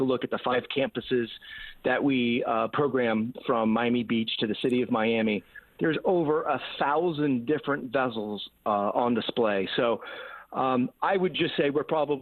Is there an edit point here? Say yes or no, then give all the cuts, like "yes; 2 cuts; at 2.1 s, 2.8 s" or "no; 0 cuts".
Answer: no; 0 cuts